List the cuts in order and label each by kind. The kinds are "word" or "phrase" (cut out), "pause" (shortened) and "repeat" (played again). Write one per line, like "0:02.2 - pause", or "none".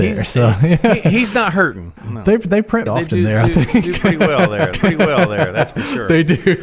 0:02.0 - pause
0:02.9 - phrase
0:04.7 - repeat